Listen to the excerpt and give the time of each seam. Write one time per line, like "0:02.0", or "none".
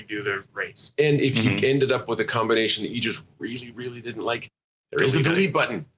none